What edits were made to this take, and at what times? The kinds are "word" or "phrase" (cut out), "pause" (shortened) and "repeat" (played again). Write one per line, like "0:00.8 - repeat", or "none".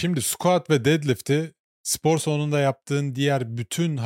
none